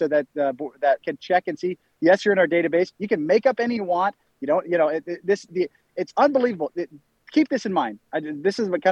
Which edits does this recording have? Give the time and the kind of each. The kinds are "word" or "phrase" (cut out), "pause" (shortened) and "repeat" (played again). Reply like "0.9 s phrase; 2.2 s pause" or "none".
1.0 s word; 3.8 s word; 5.5 s word